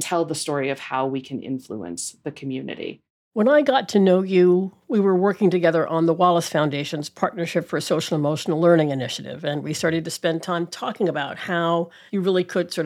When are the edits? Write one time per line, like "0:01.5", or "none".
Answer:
none